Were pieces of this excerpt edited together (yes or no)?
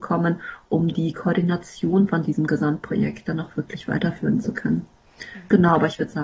no